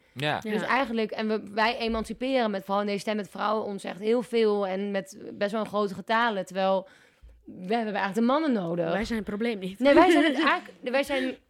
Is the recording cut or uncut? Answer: uncut